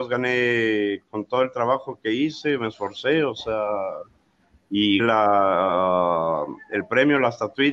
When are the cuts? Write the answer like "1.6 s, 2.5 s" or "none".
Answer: 5.0 s